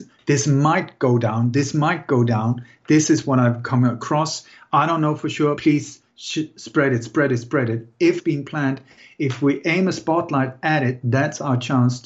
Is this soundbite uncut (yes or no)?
no